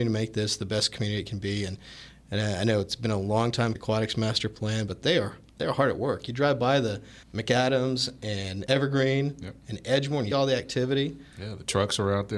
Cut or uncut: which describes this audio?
cut